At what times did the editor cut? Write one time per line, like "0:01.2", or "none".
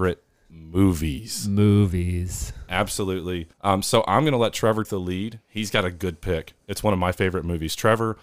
0:03.5
0:04.8